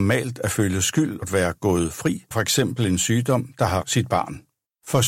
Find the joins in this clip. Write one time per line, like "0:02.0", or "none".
0:01.2
0:02.3
0:03.8